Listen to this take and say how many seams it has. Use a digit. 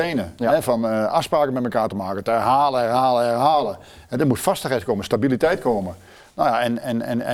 0